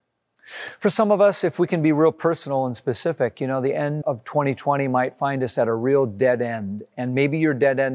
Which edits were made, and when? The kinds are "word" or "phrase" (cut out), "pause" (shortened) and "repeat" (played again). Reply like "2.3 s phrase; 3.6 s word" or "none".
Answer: 4.0 s word